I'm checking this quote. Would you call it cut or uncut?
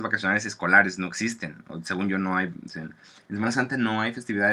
cut